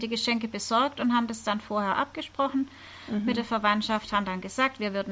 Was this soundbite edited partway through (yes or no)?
no